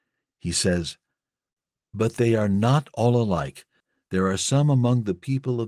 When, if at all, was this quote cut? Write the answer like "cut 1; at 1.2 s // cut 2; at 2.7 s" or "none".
none